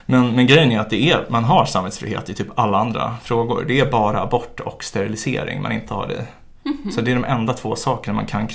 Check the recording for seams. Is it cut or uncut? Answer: uncut